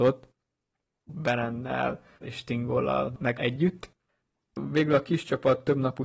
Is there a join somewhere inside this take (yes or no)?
yes